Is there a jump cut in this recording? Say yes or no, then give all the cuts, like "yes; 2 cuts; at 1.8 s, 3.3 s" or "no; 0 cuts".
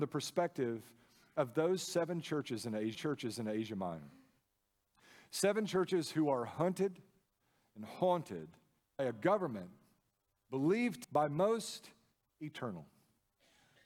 yes; 3 cuts; at 2.9 s, 9.0 s, 11.0 s